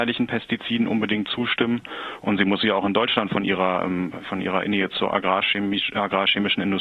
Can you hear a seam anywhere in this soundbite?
no; 0 cuts

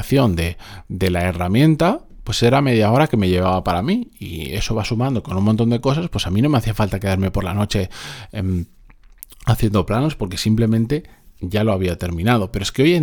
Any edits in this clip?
no; 0 cuts

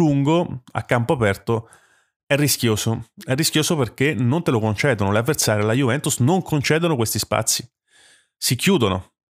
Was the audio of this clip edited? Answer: no; 0 cuts

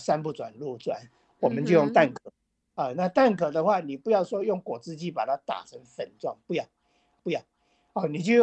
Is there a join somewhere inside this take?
yes; 1 cut; at 7.2 s

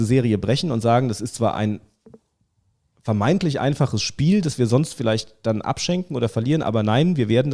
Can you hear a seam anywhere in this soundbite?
no; 0 cuts

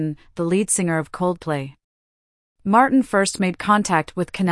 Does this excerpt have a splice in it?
no; 0 cuts

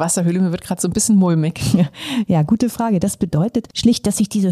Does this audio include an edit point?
no; 0 cuts

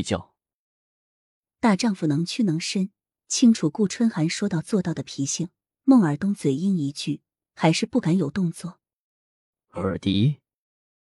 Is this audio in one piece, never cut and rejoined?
yes; 0 cuts

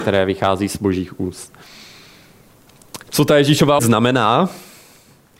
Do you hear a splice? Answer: yes; 2 cuts; at 3.0 s, 3.8 s

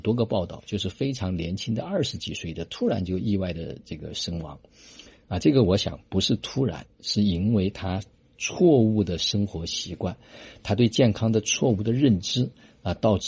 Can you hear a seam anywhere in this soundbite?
no; 0 cuts

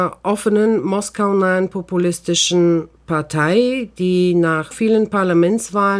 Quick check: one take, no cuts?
no; 1 cut; at 4.7 s

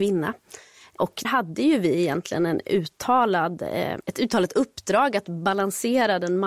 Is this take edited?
yes; 1 cut; at 1.2 s

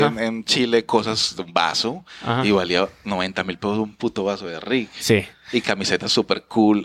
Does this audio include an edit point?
no; 0 cuts

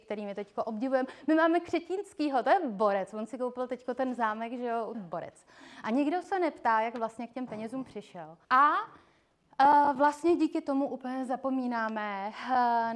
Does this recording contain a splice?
yes; 2 cuts; at 4.9 s, 8.4 s

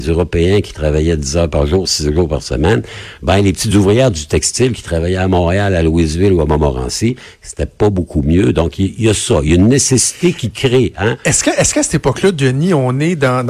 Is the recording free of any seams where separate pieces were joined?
yes; 0 cuts

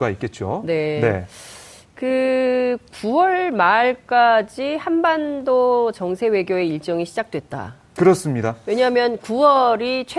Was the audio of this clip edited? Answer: no; 0 cuts

